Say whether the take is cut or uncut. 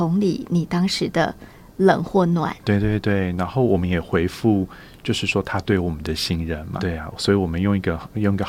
cut